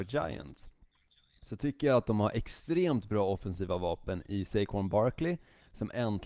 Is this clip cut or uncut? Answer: uncut